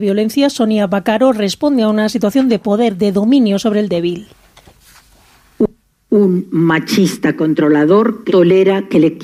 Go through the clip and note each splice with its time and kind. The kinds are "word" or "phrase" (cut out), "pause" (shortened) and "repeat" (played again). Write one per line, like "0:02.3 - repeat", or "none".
0:08.3 - word